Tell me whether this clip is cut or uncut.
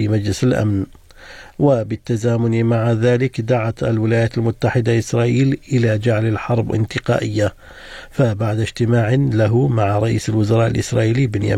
cut